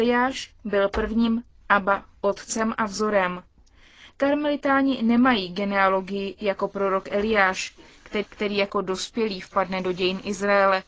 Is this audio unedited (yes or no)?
no